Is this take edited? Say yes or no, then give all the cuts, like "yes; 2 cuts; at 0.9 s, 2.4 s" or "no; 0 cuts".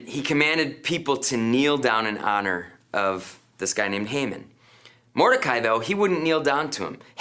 no; 0 cuts